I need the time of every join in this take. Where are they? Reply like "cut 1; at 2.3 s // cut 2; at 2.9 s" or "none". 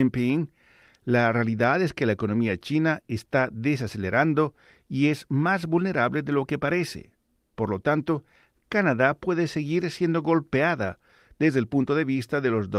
none